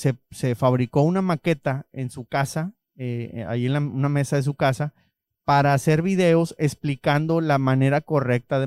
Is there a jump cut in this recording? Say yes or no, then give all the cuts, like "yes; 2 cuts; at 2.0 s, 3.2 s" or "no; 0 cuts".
no; 0 cuts